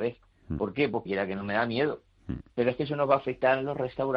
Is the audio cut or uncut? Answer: cut